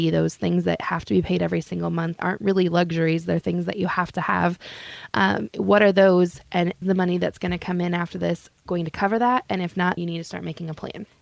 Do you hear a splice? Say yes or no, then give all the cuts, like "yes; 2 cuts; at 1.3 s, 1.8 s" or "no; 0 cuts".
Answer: yes; 4 cuts; at 2.2 s, 6.8 s, 8.6 s, 10.0 s